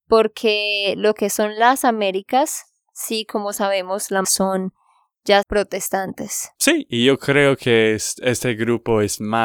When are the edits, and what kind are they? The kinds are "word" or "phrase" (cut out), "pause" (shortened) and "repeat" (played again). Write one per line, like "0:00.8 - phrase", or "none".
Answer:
0:04.2 - word
0:05.4 - phrase
0:06.5 - pause